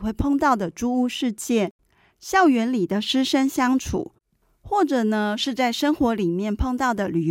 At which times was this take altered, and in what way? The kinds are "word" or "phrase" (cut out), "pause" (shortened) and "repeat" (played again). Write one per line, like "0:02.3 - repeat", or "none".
none